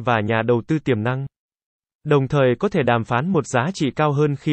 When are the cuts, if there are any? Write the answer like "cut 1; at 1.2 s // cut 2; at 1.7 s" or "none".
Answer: none